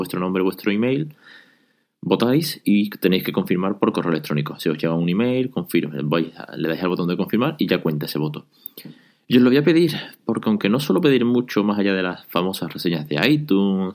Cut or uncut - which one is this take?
uncut